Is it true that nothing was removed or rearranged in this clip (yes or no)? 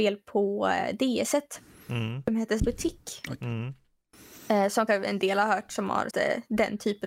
no